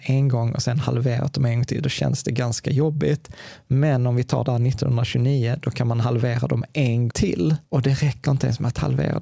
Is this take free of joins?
no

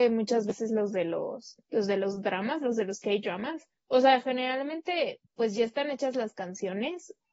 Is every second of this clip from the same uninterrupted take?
no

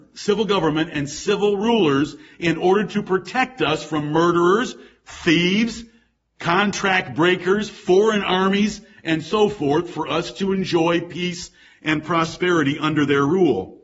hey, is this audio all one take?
yes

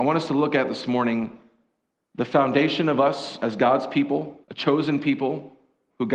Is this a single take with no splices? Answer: no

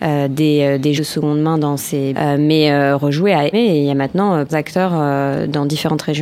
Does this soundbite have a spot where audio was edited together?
yes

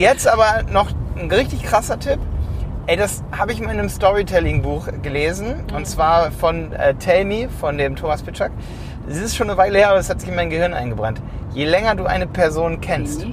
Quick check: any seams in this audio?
no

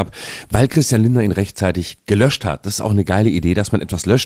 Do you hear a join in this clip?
no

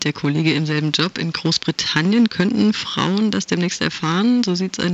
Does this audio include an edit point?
no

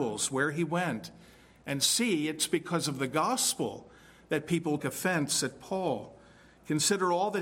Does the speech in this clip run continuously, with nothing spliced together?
no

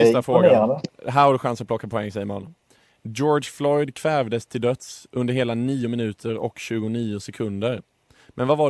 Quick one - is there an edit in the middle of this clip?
no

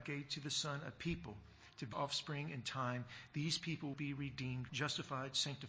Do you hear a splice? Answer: yes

